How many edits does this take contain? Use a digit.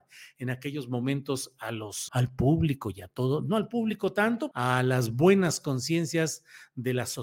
2